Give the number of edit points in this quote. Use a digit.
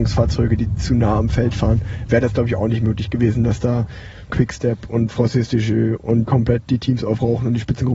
2